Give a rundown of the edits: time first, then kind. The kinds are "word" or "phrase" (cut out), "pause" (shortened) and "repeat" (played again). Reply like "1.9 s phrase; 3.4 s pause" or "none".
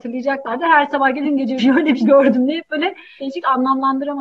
1.2 s word; 1.6 s word; 2.0 s word; 3.2 s word